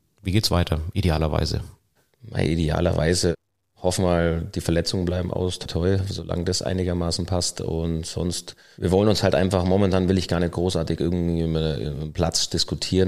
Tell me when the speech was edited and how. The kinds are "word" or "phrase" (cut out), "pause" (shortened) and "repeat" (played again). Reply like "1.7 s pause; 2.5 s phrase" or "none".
5.7 s word